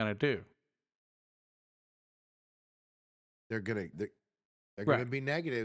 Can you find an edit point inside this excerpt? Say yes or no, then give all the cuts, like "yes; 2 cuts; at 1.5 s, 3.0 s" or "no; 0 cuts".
yes; 1 cut; at 3.9 s